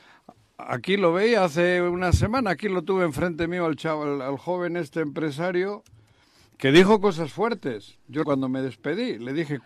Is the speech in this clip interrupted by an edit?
yes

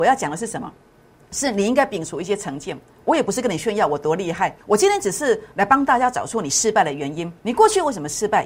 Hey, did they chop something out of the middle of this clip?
yes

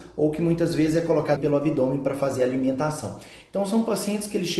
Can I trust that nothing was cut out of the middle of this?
no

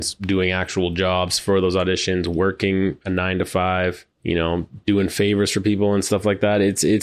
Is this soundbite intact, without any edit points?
no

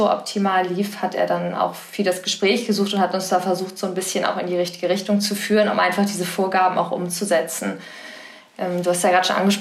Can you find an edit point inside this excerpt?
no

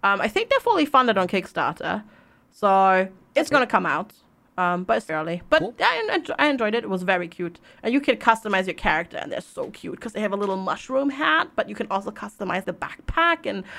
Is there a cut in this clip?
yes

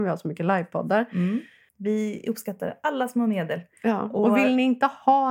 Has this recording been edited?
no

